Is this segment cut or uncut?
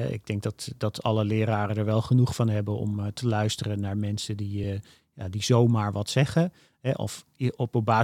uncut